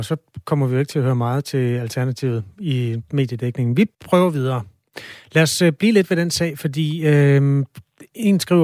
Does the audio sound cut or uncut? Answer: cut